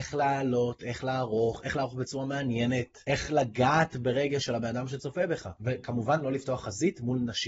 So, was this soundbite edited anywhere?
no; 0 cuts

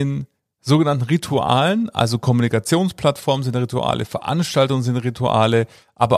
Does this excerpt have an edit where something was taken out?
no; 0 cuts

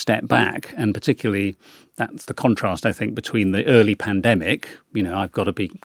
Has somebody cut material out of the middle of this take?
no; 0 cuts

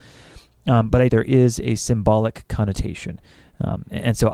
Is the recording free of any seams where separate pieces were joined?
no; 1 cut; at 1.1 s

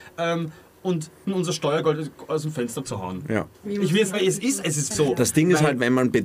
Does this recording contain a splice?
yes; 4 cuts; at 1.2 s, 3.5 s, 4.1 s, 4.9 s

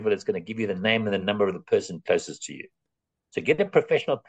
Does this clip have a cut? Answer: no; 0 cuts

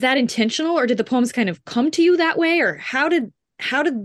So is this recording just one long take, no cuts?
yes; 0 cuts

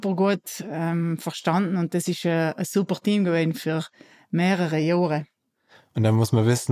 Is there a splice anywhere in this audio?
no; 0 cuts

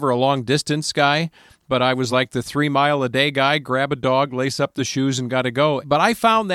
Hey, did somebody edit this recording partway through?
no; 0 cuts

